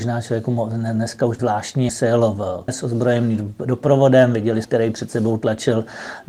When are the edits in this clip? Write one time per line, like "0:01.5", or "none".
0:01.4
0:01.9
0:02.7
0:04.6